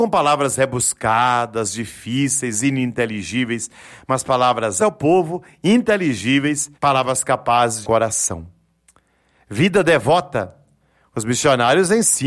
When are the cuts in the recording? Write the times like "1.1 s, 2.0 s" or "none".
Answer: 4.8 s, 6.8 s, 7.8 s